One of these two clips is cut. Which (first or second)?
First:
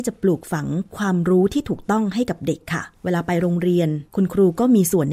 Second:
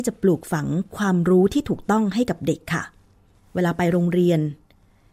first